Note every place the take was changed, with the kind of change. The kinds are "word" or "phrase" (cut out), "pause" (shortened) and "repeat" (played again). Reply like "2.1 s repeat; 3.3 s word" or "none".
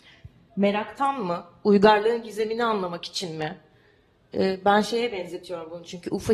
none